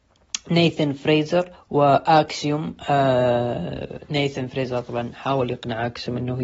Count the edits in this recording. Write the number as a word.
one